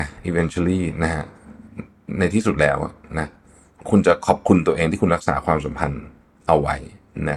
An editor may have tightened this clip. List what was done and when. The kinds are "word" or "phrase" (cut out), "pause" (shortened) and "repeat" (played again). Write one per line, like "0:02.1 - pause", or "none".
none